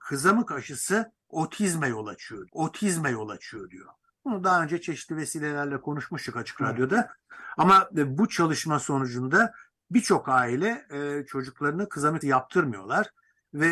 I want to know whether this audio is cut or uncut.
cut